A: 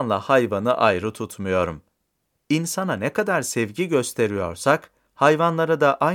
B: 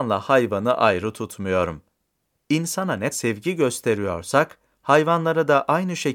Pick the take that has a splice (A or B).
B